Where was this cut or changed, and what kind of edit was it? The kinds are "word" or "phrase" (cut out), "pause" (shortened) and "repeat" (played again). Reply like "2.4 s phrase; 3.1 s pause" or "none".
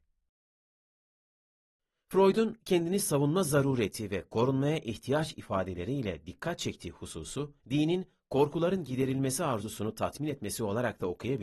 7.6 s pause